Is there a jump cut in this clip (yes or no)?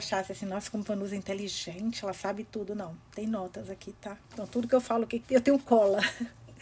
yes